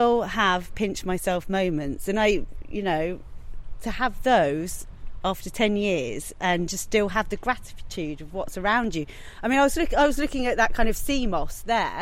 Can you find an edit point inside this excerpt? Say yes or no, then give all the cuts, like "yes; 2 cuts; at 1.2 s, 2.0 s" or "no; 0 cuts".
no; 0 cuts